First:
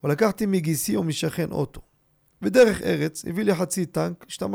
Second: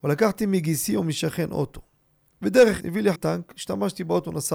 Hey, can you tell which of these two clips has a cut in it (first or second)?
second